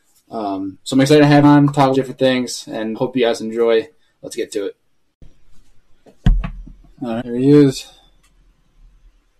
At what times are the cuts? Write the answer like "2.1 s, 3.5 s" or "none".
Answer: 1.4 s, 1.9 s, 2.9 s, 7.2 s